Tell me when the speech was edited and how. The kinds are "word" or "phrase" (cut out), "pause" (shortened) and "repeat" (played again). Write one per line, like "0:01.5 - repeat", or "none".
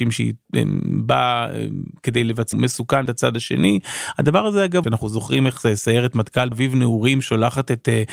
0:02.5 - phrase
0:03.1 - word
0:04.8 - phrase
0:06.5 - word